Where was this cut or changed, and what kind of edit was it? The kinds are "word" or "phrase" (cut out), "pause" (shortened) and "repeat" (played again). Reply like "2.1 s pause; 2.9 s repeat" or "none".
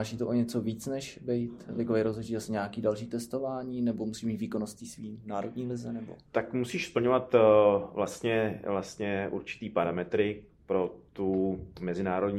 6.3 s pause; 10.5 s pause